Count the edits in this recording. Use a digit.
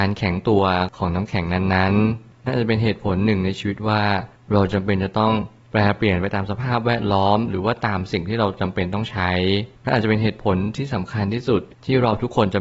1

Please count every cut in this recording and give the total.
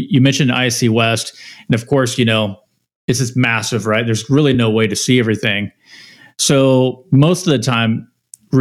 0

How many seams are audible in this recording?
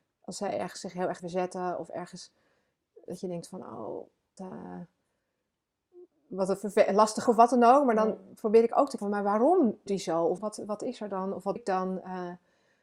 8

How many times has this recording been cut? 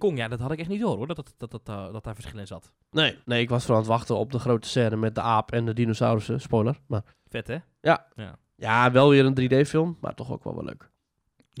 3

